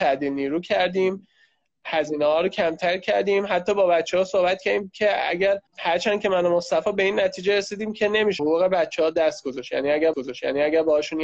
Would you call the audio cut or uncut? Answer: cut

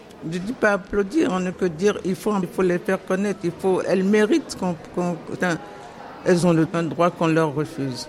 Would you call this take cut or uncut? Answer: cut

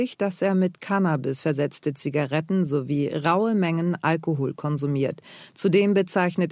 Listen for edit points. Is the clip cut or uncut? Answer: uncut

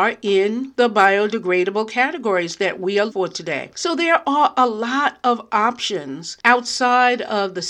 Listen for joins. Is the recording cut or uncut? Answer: cut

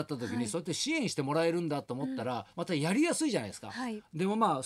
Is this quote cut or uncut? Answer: cut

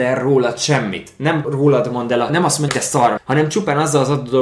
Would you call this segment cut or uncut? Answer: cut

